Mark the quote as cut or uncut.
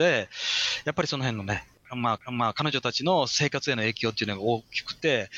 cut